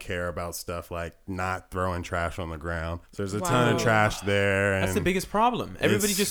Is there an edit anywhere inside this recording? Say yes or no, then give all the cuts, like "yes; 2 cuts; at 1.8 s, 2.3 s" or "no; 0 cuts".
yes; 1 cut; at 3.0 s